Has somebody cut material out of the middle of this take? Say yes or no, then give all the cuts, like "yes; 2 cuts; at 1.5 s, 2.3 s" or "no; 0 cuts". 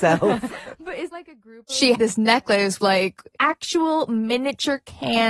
yes; 3 cuts; at 1.1 s, 1.9 s, 2.8 s